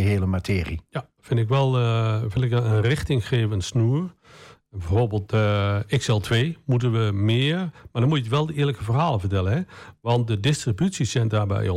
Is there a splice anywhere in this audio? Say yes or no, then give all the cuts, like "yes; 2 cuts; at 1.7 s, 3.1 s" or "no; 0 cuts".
no; 0 cuts